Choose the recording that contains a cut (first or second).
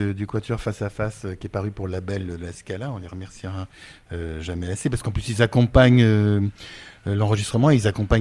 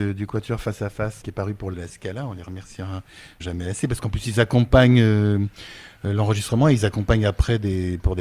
second